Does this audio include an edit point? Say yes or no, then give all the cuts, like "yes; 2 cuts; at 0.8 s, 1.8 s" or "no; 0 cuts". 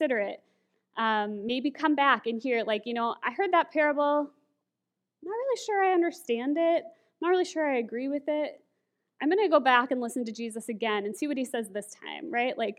no; 0 cuts